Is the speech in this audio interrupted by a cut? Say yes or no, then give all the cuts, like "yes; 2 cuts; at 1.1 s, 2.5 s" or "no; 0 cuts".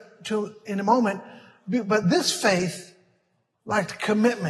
no; 0 cuts